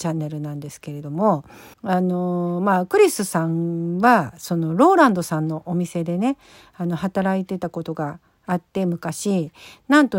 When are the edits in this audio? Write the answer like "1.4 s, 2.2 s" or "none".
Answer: 1.7 s